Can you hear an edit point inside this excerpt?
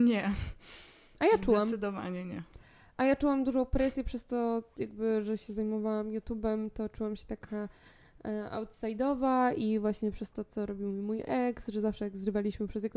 no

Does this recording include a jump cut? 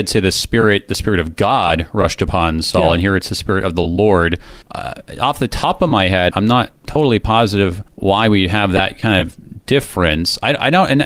yes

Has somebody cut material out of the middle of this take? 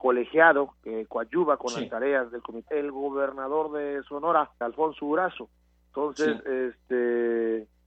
yes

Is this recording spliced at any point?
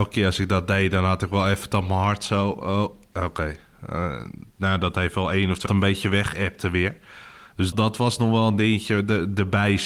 yes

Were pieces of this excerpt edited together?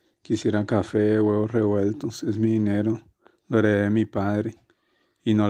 no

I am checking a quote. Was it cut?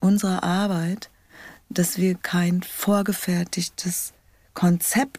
no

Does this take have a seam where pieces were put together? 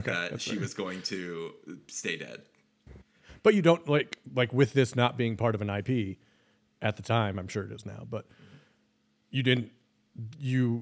no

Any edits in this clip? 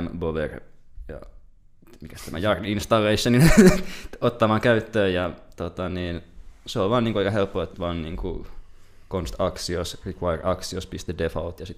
yes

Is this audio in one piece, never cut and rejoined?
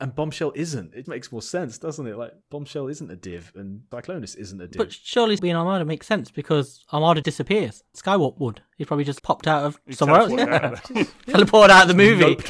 no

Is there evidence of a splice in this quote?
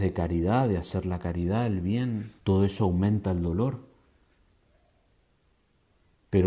yes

